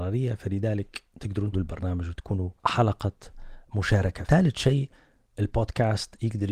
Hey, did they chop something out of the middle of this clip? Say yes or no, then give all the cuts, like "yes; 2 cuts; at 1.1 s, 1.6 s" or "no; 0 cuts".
yes; 2 cuts; at 1.5 s, 4.3 s